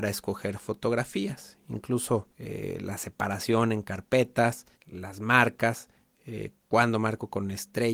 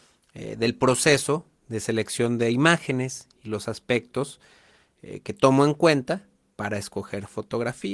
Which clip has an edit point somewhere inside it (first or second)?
first